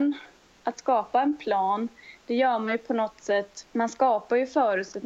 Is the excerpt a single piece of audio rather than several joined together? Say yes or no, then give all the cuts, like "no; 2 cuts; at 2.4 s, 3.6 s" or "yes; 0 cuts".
no; 1 cut; at 3.7 s